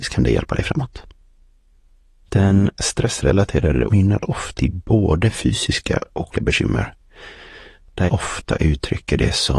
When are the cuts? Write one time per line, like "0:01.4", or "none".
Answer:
0:03.9
0:04.5
0:06.3
0:08.1